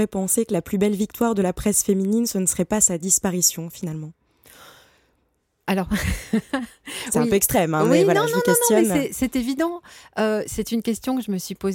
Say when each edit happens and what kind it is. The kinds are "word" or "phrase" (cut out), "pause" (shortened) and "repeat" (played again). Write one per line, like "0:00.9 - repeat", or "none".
none